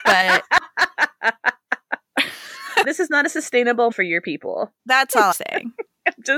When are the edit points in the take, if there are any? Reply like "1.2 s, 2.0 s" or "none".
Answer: 2.8 s, 3.9 s, 4.8 s, 5.3 s